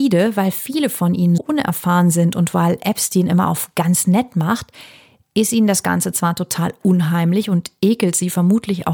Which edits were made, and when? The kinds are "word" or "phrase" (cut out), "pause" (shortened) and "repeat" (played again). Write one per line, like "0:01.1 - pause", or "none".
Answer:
0:01.4 - word